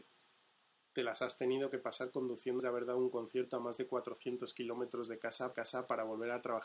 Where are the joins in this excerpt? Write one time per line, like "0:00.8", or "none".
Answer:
0:02.6
0:05.5